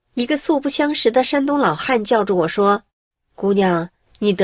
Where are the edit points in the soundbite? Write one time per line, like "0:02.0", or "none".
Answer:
0:02.9